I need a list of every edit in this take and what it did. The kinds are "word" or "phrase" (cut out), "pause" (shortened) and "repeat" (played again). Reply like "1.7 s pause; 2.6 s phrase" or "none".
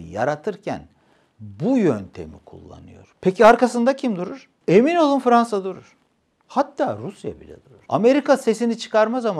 none